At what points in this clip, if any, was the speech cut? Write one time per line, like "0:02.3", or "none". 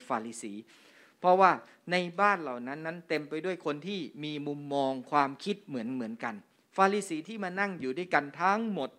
0:06.6